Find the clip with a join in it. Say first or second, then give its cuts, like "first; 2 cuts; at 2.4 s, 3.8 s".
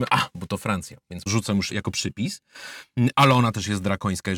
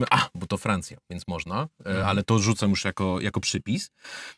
first; 2 cuts; at 1.3 s, 1.7 s